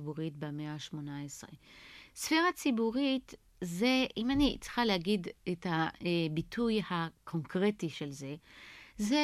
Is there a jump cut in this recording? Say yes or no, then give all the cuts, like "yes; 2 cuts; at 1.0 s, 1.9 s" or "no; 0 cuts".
no; 0 cuts